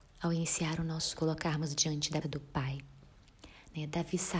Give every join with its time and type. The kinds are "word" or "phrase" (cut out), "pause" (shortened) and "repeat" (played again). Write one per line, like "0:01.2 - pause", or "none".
0:01.1 - phrase
0:02.2 - word